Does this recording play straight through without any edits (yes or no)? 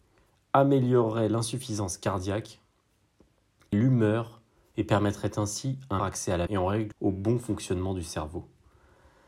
no